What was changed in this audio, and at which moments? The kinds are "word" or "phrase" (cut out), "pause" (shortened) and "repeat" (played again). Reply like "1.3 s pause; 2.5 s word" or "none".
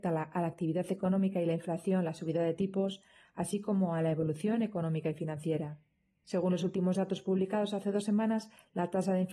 none